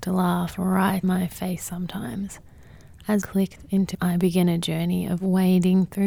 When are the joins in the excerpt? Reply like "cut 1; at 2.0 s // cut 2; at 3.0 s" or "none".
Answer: cut 1; at 1.0 s // cut 2; at 3.2 s // cut 3; at 3.9 s